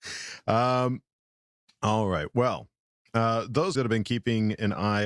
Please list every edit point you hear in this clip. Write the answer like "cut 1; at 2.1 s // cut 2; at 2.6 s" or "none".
cut 1; at 3.7 s